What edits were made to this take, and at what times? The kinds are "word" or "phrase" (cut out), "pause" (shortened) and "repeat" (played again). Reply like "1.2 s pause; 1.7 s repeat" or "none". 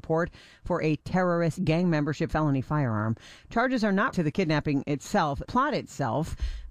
1.6 s word; 2.3 s word; 4.1 s word; 5.4 s word